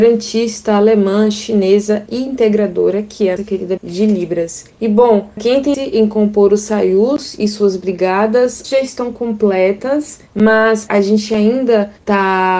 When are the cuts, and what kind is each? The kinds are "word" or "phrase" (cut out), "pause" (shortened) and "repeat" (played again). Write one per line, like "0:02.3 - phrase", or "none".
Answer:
0:02.1 - word
0:03.4 - word
0:03.8 - word
0:05.4 - word
0:05.7 - word
0:08.6 - word